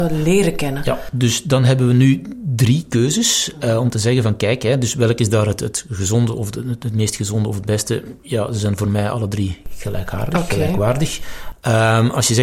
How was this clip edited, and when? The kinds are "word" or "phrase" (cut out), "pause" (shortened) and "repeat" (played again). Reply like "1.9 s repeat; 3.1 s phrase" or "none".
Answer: none